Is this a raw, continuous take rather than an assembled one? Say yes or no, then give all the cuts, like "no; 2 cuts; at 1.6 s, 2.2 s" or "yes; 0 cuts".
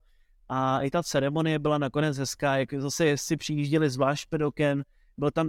yes; 0 cuts